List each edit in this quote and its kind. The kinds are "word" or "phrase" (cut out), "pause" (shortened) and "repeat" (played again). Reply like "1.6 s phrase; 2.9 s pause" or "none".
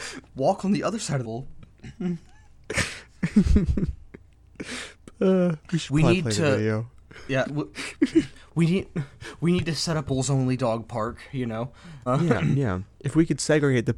1.2 s phrase; 7.4 s word; 10.0 s phrase; 12.1 s word; 12.9 s pause